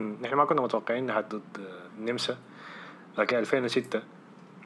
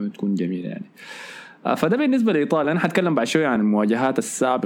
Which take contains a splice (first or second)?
first